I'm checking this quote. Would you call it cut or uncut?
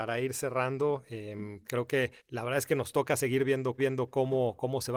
cut